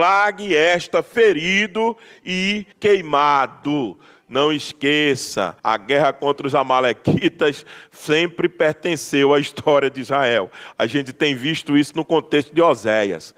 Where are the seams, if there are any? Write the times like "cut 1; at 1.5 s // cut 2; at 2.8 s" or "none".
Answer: cut 1; at 2.7 s // cut 2; at 5.6 s